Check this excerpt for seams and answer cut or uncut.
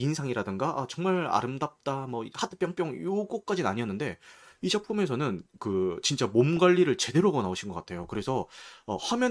uncut